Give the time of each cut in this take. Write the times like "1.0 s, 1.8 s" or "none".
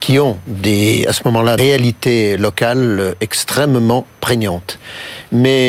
1.6 s